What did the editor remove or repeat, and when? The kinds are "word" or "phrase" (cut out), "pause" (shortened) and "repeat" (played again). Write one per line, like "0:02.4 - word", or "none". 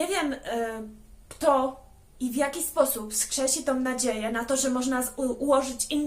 none